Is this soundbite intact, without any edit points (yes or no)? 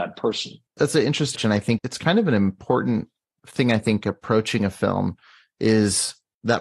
no